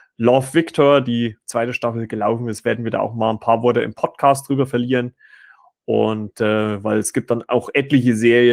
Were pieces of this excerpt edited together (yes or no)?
no